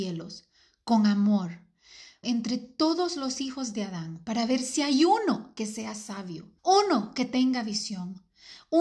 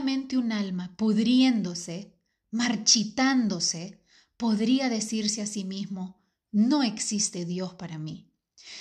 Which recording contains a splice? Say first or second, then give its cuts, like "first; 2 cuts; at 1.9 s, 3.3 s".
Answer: first; 2 cuts; at 2.2 s, 6.6 s